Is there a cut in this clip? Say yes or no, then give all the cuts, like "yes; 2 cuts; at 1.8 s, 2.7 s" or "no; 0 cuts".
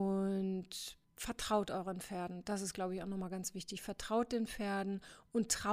yes; 1 cut; at 1.0 s